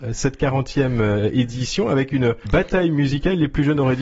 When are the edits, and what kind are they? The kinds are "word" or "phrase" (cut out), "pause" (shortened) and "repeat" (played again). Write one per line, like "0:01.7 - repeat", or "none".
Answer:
0:02.5 - word